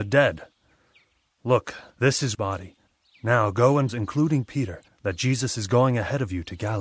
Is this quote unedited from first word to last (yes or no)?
no